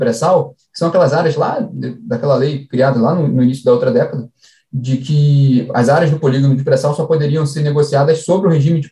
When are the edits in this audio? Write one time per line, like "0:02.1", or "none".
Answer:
none